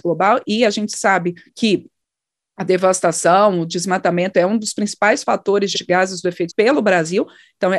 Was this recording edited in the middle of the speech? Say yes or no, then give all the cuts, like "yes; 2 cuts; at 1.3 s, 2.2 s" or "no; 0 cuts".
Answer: yes; 3 cuts; at 1.5 s, 5.7 s, 6.5 s